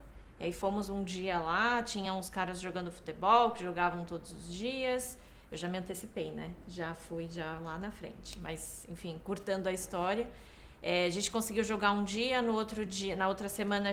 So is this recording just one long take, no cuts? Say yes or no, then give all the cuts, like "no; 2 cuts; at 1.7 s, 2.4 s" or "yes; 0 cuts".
yes; 0 cuts